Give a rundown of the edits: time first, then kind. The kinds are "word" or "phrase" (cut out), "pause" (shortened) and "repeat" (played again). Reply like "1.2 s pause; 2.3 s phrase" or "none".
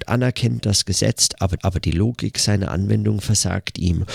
1.6 s repeat